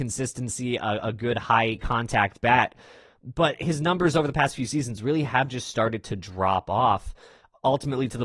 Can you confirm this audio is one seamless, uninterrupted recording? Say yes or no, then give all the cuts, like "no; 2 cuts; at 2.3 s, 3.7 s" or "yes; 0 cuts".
yes; 0 cuts